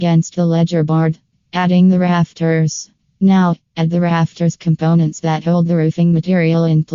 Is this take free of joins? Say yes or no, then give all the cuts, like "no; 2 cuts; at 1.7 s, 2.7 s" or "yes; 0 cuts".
yes; 0 cuts